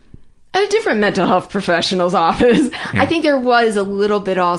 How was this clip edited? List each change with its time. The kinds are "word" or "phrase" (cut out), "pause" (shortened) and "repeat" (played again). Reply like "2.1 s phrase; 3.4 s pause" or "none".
none

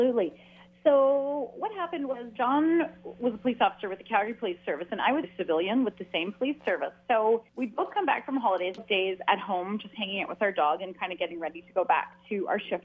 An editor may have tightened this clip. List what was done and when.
2.3 s word; 5.2 s word; 7.5 s pause; 8.8 s phrase

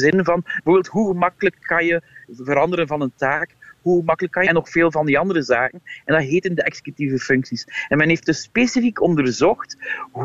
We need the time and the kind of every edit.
4.5 s phrase

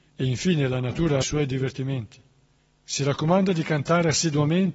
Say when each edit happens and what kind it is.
1.2 s phrase; 2.6 s pause

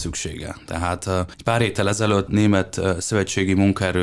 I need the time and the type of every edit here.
1.3 s pause; 2.3 s phrase

